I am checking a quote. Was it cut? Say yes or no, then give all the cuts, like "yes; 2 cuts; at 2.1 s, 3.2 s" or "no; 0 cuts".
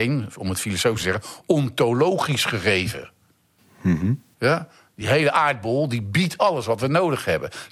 no; 0 cuts